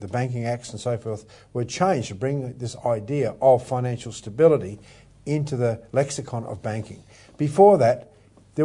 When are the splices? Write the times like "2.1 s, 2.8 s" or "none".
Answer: none